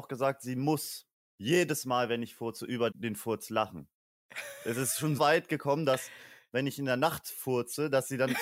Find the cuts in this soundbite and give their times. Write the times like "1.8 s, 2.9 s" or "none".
2.9 s, 5.2 s

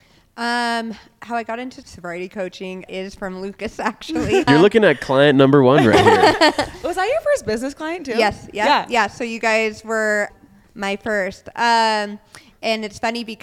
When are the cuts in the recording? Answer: 1.8 s, 2.9 s, 4.5 s, 10.3 s

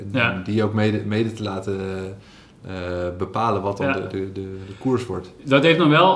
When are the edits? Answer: none

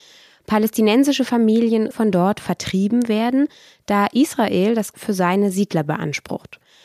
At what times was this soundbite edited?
1.9 s, 4.9 s

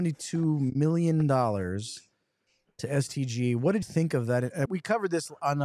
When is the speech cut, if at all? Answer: 3.8 s, 4.7 s

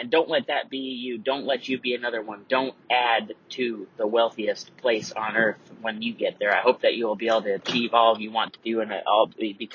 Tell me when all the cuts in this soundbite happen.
none

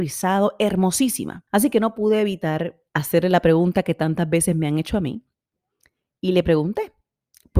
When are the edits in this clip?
1.5 s, 2.9 s

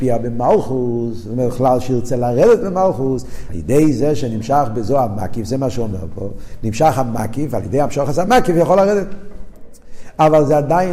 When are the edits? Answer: 3.5 s

